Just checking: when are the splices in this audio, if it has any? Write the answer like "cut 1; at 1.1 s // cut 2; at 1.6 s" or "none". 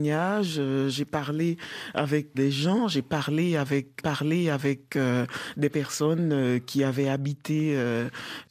cut 1; at 2.3 s // cut 2; at 4.0 s